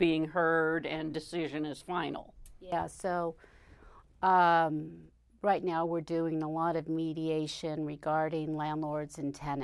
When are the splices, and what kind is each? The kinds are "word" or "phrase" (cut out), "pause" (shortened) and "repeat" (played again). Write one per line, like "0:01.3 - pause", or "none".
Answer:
none